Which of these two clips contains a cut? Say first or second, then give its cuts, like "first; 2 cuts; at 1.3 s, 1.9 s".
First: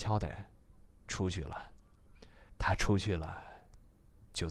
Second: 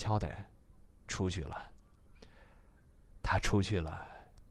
first; 1 cut; at 2.5 s